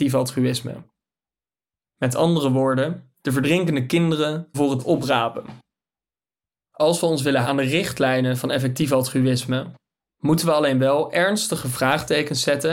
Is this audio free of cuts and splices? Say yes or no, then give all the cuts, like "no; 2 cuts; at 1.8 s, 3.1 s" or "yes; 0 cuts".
no; 2 cuts; at 4.5 s, 7.4 s